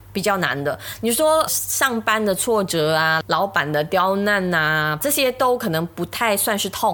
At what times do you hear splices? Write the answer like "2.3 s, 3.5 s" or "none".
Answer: 1.5 s, 5.0 s